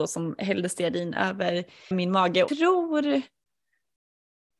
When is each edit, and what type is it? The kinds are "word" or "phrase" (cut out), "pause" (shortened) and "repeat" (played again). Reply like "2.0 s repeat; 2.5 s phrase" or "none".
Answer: 1.9 s word; 2.5 s word